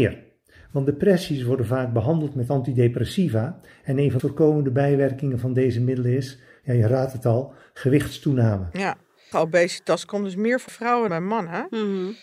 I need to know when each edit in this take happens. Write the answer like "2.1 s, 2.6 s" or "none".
4.2 s, 9.3 s, 10.7 s, 11.1 s